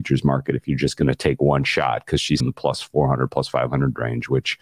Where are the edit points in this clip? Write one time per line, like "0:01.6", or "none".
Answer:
0:02.4